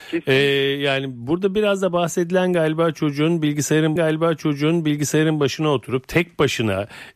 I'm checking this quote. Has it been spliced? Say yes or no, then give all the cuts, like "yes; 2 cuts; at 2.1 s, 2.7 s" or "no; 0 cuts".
yes; 1 cut; at 4.0 s